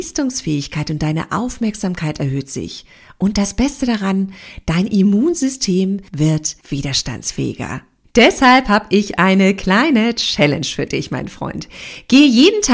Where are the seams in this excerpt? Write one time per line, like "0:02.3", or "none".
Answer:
none